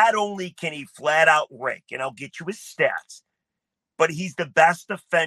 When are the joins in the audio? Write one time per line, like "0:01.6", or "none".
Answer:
none

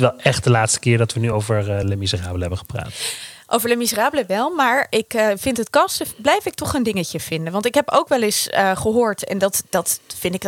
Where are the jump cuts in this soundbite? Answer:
none

